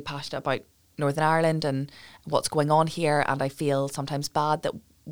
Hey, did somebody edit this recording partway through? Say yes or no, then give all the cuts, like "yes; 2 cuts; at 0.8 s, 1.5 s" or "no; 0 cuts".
no; 0 cuts